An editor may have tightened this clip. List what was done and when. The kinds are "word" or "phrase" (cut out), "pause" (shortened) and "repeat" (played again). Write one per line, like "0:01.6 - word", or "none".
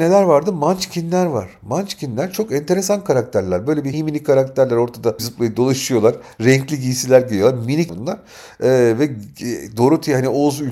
0:03.9 - word
0:05.2 - word
0:07.9 - word